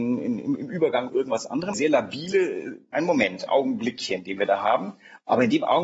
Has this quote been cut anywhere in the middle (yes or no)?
yes